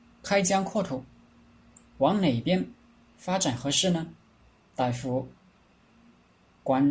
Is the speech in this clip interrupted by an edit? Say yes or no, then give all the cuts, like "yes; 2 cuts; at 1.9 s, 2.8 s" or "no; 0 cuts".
no; 0 cuts